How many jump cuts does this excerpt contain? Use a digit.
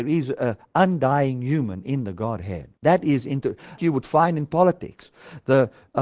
2